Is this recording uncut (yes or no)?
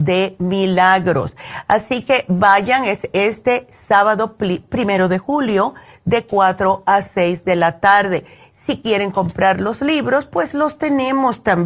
yes